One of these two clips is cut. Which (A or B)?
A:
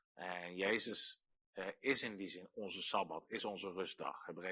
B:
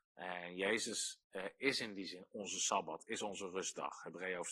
B